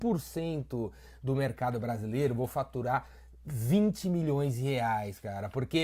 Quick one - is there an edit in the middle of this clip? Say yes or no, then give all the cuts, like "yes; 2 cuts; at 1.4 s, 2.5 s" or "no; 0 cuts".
no; 0 cuts